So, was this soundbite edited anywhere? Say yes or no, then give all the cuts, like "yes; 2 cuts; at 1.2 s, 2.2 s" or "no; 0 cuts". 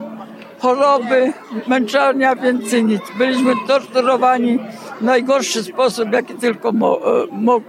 no; 0 cuts